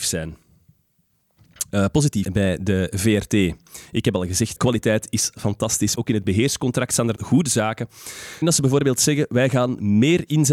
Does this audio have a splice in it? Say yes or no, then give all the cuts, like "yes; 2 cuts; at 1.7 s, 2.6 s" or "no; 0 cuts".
yes; 6 cuts; at 2.2 s, 4.6 s, 5.3 s, 6.0 s, 7.2 s, 8.4 s